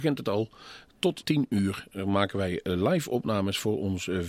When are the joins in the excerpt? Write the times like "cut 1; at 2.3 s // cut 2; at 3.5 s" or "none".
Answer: cut 1; at 1.2 s